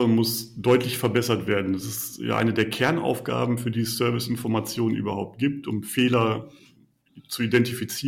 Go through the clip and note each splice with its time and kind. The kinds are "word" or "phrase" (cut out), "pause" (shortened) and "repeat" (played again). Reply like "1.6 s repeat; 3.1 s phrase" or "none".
none